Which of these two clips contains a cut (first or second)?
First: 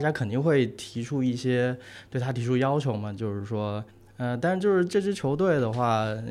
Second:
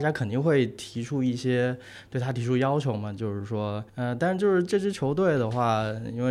second